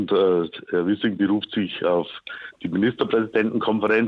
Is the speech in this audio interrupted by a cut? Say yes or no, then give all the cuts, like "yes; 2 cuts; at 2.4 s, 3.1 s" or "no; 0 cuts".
no; 0 cuts